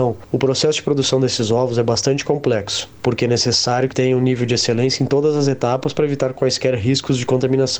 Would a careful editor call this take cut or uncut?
cut